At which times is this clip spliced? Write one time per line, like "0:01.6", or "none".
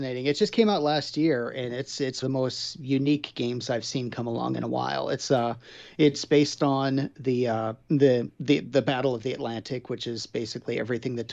0:02.2
0:07.8